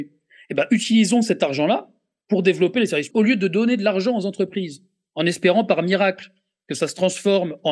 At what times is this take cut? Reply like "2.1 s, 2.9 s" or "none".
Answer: 3.1 s